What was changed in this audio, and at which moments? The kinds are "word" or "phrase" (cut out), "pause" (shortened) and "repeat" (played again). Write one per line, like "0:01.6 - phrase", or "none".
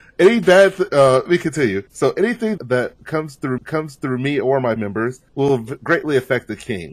0:01.3 - word
0:01.9 - pause
0:02.6 - phrase
0:03.6 - repeat
0:04.8 - word
0:05.3 - pause